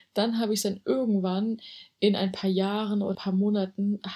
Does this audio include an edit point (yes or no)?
yes